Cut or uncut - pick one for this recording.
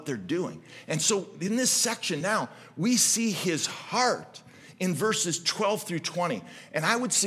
uncut